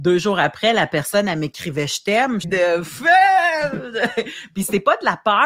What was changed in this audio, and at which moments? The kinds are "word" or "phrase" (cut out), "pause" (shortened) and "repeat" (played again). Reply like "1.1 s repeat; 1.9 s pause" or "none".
2.4 s phrase

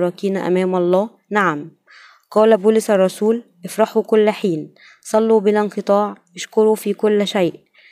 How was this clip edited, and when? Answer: none

